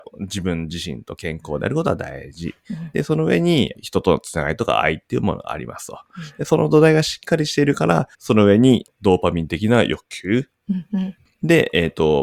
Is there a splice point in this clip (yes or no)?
yes